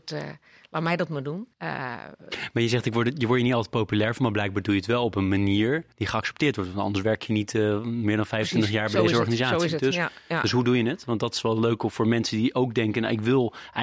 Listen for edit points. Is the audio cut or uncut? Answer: cut